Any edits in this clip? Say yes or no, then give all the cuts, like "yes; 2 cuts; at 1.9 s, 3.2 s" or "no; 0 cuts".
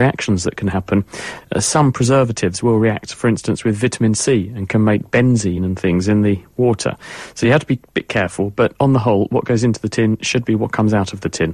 no; 0 cuts